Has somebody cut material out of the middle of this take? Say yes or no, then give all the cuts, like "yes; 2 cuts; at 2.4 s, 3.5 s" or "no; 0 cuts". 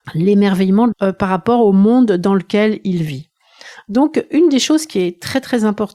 yes; 1 cut; at 0.9 s